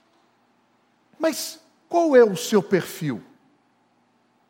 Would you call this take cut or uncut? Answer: uncut